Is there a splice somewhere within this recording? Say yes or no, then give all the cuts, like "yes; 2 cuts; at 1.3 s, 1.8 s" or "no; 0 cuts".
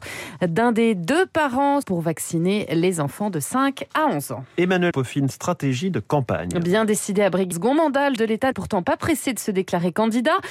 yes; 6 cuts; at 1.8 s, 4.9 s, 5.3 s, 7.5 s, 8.2 s, 8.5 s